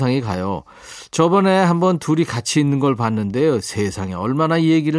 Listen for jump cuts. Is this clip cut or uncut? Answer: uncut